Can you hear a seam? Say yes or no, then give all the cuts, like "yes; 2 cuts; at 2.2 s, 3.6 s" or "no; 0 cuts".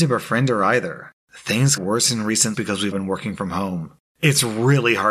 yes; 3 cuts; at 1.8 s, 2.5 s, 2.9 s